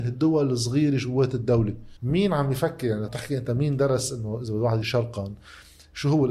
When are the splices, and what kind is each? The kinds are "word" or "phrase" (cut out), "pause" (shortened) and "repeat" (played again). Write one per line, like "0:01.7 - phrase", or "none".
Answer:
0:02.0 - pause
0:03.1 - word
0:04.8 - word

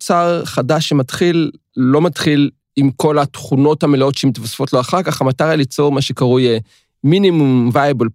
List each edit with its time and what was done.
none

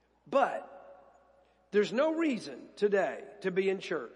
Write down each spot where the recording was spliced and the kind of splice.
none

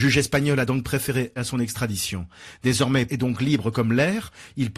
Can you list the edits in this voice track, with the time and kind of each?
0:01.4 - word
0:03.1 - word

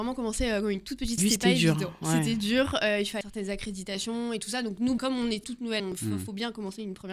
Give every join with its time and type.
0:01.2 - word
0:03.2 - word
0:05.0 - word
0:05.4 - word
0:05.8 - word

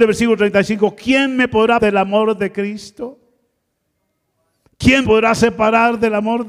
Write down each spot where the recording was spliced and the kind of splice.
0:01.8 - word
0:05.0 - word

